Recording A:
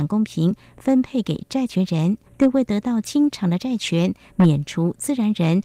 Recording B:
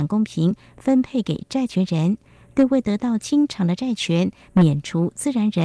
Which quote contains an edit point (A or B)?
A